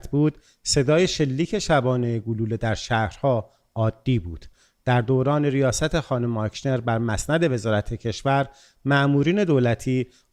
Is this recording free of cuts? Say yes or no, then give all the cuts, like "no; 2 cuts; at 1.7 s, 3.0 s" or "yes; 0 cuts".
yes; 0 cuts